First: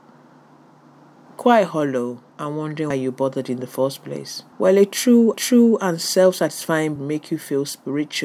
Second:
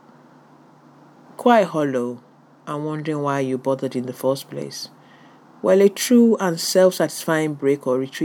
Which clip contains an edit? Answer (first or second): first